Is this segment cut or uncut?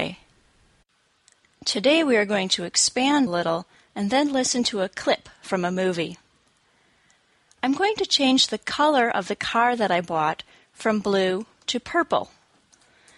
cut